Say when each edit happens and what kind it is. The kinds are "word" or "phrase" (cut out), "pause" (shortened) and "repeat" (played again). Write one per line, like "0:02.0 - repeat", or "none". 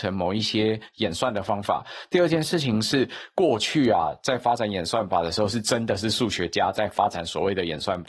none